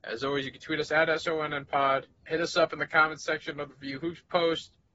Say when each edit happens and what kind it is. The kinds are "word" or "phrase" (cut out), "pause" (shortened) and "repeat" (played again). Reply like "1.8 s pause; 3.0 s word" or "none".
2.2 s pause